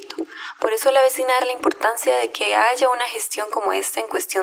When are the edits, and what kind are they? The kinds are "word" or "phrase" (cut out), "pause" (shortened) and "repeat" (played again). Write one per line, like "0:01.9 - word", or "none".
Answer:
0:01.4 - word